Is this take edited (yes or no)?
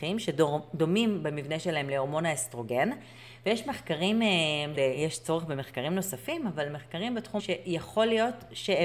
yes